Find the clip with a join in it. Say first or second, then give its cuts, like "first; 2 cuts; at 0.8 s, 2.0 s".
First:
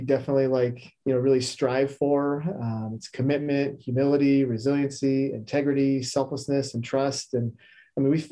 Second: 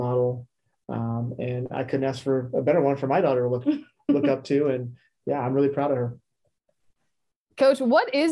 first; 1 cut; at 1.0 s